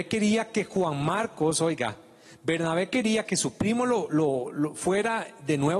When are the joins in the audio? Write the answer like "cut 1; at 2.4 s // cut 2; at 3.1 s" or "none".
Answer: none